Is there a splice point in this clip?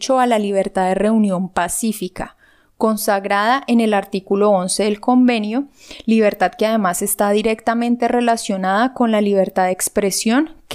no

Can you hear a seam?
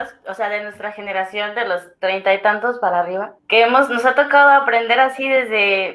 yes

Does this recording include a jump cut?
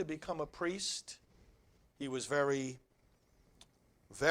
no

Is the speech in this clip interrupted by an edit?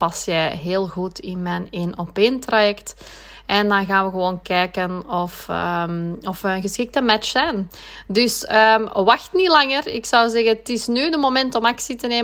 no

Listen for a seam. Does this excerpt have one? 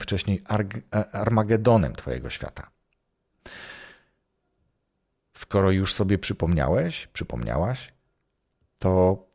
no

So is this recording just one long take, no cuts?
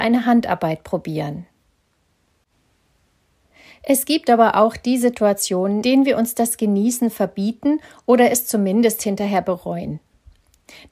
no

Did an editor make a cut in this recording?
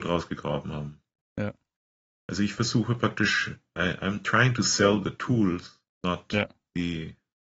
no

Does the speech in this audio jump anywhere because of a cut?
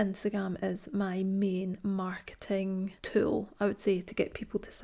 yes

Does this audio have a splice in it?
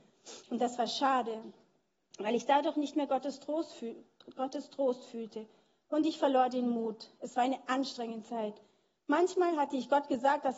no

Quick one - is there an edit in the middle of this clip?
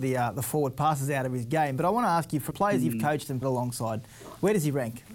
yes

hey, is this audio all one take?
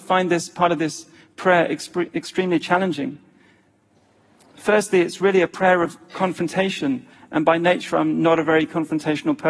yes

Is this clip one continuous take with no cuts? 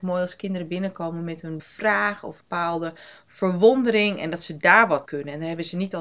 no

